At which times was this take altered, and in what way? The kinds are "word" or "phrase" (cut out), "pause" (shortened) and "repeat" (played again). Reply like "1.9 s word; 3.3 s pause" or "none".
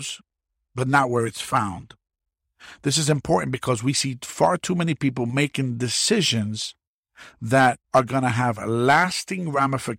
7.8 s pause

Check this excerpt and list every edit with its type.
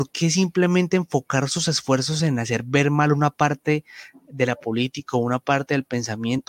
none

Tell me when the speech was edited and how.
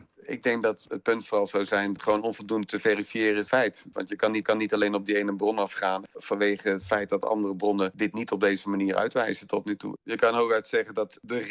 2.0 s phrase; 3.5 s word; 4.4 s repeat

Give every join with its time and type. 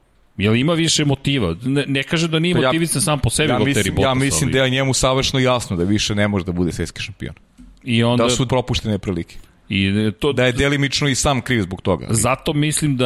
8.5 s word

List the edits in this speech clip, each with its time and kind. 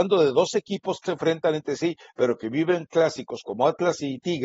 1.1 s phrase

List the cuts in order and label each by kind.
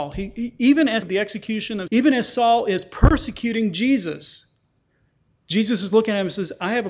1.0 s phrase; 1.9 s word

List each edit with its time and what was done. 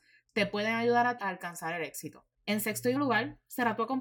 1.2 s word; 2.3 s pause; 3.0 s word

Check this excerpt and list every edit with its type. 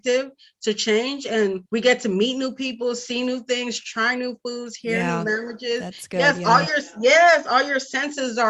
1.7 s pause

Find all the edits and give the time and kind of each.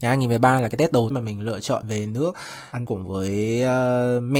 1.1 s word; 2.9 s word

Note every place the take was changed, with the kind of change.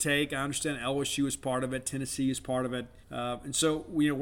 3.0 s pause

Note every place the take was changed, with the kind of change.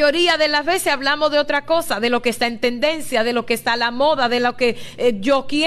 none

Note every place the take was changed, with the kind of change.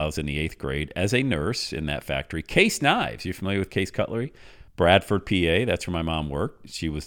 4.7 s pause

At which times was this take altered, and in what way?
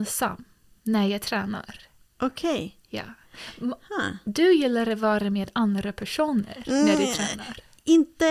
none

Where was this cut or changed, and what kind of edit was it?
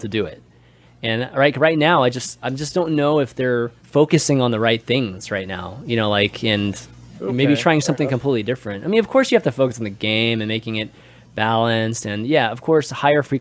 3.8 s pause

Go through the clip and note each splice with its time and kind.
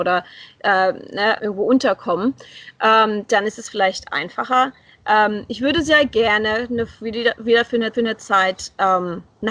1.4 s word; 7.9 s repeat

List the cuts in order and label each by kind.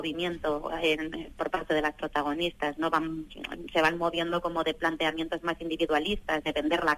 none

